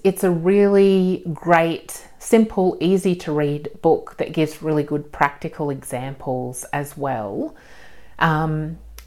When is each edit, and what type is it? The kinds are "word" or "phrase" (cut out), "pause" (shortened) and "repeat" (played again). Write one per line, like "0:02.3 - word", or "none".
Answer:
none